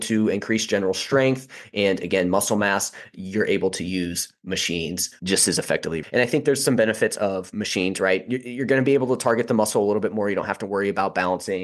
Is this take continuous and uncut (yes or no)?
yes